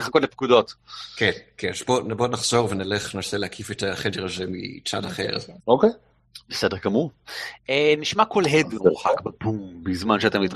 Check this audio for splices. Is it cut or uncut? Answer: cut